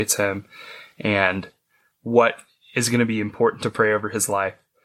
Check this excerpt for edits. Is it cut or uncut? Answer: uncut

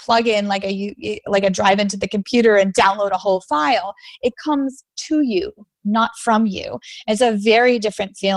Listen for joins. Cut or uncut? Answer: uncut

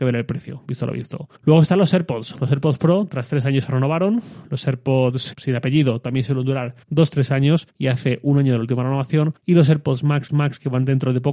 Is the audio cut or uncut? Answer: cut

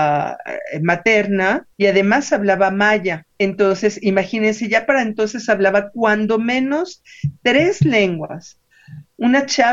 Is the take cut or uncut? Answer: cut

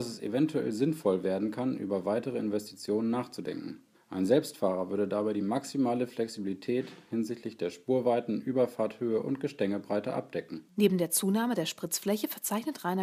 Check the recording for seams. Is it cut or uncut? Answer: cut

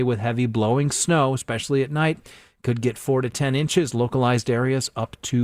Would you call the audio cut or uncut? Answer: uncut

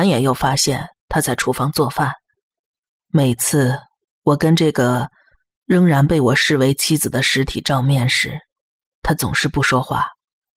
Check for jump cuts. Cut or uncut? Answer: uncut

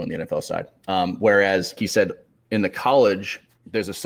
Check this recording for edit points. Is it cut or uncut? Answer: cut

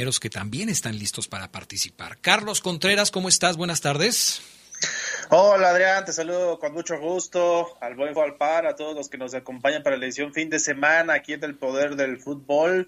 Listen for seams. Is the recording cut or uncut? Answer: cut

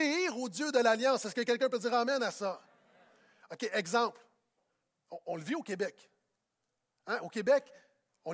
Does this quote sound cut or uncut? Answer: uncut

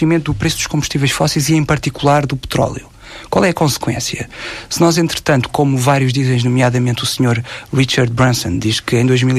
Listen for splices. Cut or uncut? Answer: uncut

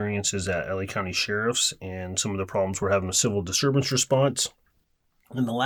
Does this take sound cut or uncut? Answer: uncut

